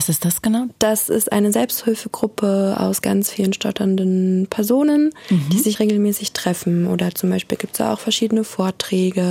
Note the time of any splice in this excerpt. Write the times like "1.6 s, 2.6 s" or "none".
5.7 s